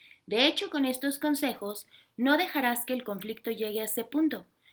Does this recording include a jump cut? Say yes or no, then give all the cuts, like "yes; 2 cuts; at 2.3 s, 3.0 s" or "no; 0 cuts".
no; 0 cuts